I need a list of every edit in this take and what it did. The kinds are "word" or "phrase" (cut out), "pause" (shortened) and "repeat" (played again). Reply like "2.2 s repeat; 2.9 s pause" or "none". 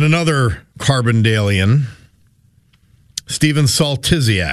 none